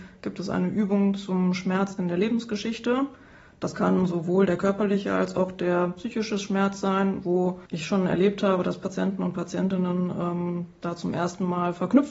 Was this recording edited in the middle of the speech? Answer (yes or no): yes